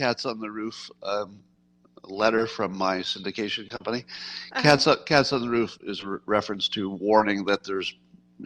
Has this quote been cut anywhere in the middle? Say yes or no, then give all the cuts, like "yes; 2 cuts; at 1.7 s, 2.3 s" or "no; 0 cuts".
no; 0 cuts